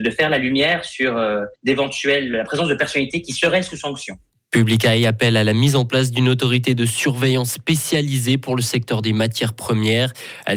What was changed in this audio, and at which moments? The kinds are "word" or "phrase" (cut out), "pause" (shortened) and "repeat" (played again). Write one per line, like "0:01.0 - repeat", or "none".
0:01.6 - pause